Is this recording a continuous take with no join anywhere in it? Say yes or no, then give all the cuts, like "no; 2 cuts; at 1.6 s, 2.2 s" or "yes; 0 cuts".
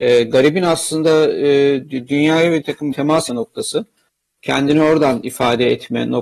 no; 3 cuts; at 2.6 s, 2.9 s, 3.3 s